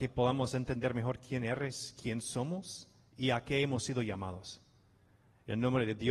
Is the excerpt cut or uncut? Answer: uncut